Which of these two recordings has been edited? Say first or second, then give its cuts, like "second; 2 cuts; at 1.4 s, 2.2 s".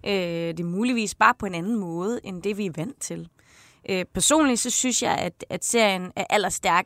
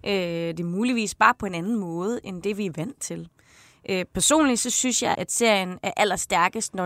second; 1 cut; at 5.1 s